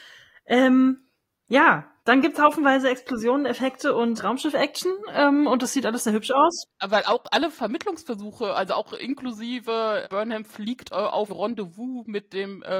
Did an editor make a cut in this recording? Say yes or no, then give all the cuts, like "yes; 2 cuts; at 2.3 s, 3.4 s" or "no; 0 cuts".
yes; 4 cuts; at 2.0 s, 4.2 s, 10.0 s, 11.3 s